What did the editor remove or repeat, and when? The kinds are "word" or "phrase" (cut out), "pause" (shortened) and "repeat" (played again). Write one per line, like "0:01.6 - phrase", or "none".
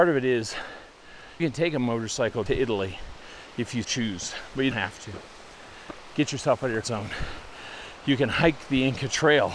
0:01.4 - word
0:02.5 - word
0:03.8 - word
0:04.7 - word
0:06.8 - word